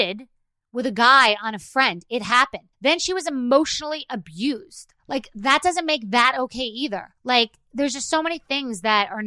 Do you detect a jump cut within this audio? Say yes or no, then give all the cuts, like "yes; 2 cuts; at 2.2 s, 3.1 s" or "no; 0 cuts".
yes; 3 cuts; at 2.7 s, 5.0 s, 7.2 s